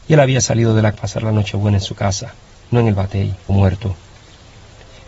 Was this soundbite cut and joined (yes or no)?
yes